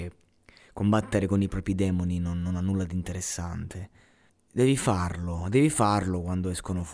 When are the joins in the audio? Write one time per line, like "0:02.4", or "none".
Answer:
0:04.3